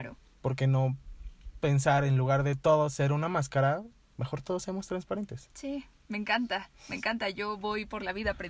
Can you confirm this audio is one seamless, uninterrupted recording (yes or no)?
yes